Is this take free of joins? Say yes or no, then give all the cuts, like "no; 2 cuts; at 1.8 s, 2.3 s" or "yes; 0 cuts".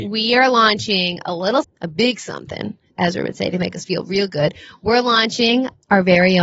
no; 2 cuts; at 1.6 s, 2.9 s